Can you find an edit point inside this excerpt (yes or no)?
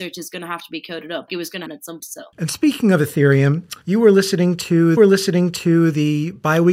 yes